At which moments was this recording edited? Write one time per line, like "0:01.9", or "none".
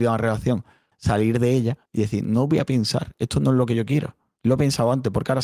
0:00.9
0:01.9

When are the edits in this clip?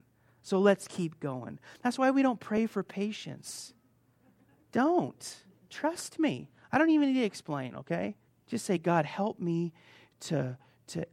0:08.3

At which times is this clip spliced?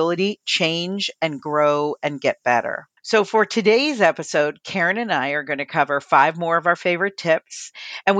0:03.0

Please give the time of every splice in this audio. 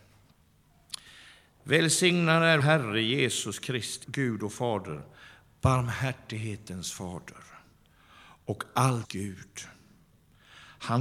0:02.6
0:04.0
0:09.0

